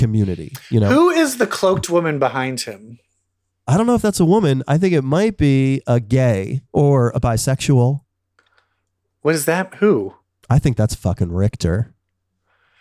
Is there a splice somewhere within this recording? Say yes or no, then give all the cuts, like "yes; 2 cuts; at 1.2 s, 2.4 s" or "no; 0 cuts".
yes; 1 cut; at 10.2 s